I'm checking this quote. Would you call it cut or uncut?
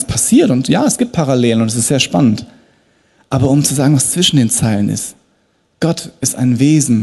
uncut